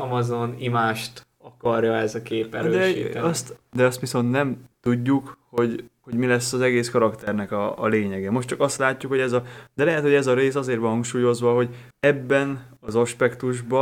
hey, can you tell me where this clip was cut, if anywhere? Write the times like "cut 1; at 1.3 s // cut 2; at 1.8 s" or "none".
cut 1; at 4.7 s // cut 2; at 11.9 s

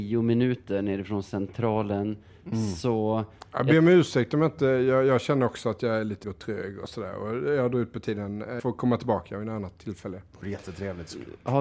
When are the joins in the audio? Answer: cut 1; at 6.2 s // cut 2; at 8.6 s

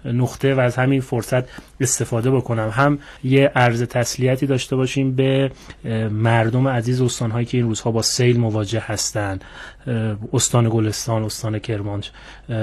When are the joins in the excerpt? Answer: cut 1; at 3.2 s

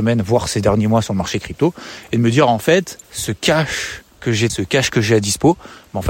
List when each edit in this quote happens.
cut 1; at 3.0 s // cut 2; at 4.1 s // cut 3; at 4.5 s

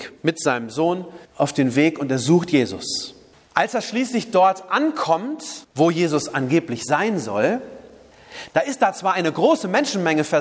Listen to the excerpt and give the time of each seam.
cut 1; at 1.2 s // cut 2; at 3.3 s // cut 3; at 5.6 s

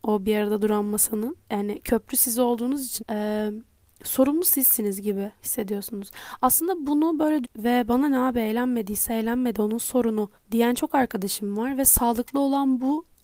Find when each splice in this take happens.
cut 1; at 1.4 s // cut 2; at 3.0 s // cut 3; at 5.4 s // cut 4; at 7.4 s // cut 5; at 10.4 s

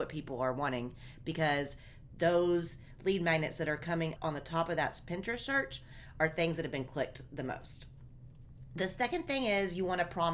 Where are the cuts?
cut 1; at 4.2 s

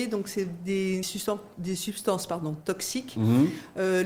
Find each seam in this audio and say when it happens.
cut 1; at 1.0 s

